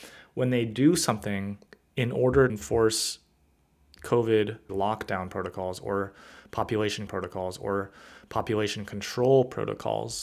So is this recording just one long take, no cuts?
no; 4 cuts; at 1.7 s, 2.5 s, 4.7 s, 7.1 s

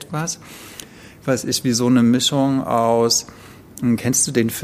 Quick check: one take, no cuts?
yes; 0 cuts

